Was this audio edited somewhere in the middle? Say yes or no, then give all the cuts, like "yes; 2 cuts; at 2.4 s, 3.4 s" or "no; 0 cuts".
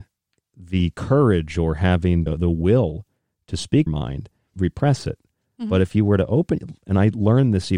yes; 3 cuts; at 2.3 s, 3.9 s, 4.5 s